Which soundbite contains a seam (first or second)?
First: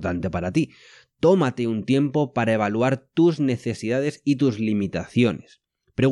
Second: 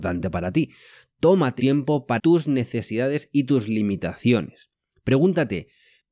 second